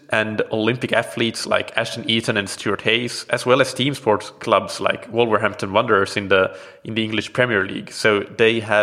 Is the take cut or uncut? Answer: uncut